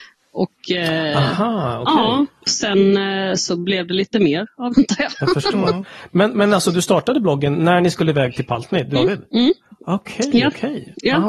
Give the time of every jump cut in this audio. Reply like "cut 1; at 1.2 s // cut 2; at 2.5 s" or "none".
cut 1; at 2.5 s // cut 2; at 4.7 s // cut 3; at 9.0 s

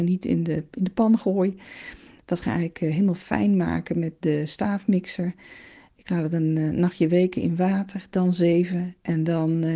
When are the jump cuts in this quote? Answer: none

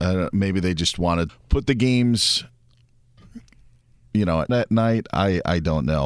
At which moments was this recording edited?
cut 1; at 1.3 s // cut 2; at 4.5 s

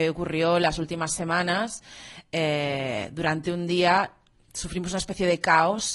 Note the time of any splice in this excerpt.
none

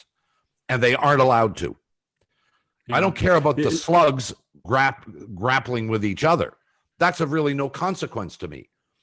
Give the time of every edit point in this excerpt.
cut 1; at 4.6 s

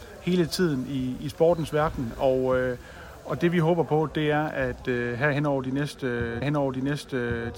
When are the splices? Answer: cut 1; at 6.4 s

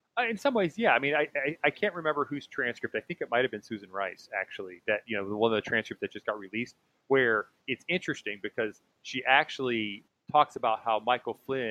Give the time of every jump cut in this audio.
none

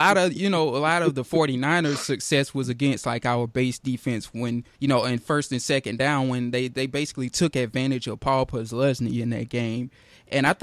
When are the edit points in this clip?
cut 1; at 4.7 s

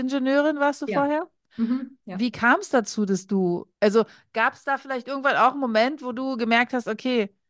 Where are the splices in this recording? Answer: cut 1; at 3.7 s

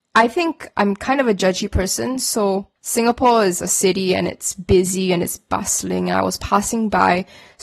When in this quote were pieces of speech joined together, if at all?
cut 1; at 2.8 s

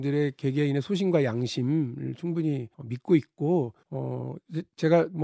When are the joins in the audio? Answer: cut 1; at 2.7 s // cut 2; at 3.8 s

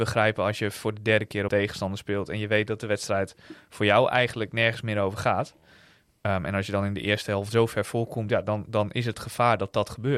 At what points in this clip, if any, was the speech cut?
cut 1; at 1.5 s

